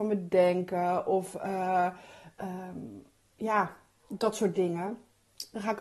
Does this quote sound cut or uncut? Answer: uncut